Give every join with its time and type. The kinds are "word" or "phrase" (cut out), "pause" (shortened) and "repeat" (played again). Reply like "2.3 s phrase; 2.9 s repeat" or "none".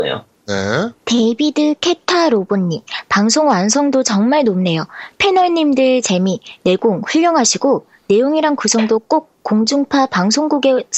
1.0 s pause